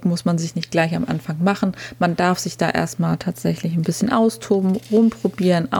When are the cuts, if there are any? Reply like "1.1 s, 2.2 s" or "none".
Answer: none

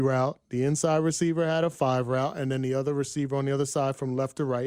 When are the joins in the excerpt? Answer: none

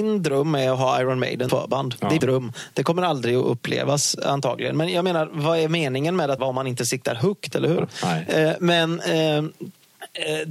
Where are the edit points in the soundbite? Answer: 1.5 s, 2.2 s, 6.4 s

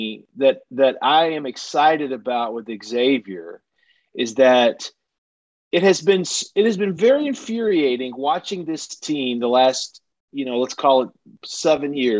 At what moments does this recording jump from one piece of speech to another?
none

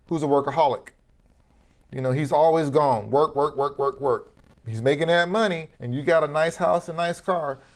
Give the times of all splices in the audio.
5.7 s

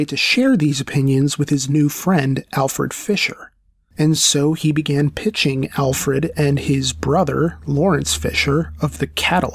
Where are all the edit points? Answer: none

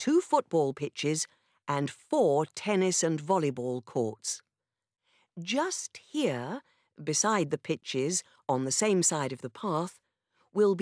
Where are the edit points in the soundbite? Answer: none

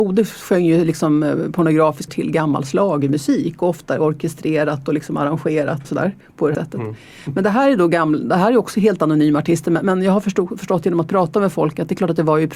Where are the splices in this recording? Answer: 2.1 s, 5.8 s, 6.5 s

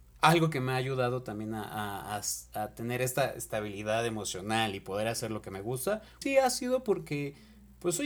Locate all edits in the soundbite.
6.2 s

